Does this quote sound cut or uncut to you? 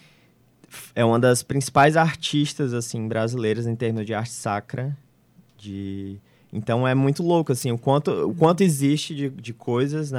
uncut